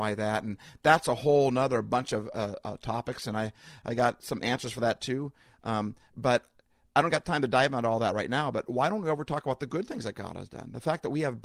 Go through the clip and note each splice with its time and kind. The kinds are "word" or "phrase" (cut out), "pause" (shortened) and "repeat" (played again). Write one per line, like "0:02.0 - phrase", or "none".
none